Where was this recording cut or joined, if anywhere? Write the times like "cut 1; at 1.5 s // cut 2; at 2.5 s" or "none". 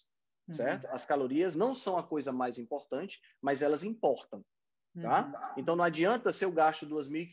cut 1; at 1.5 s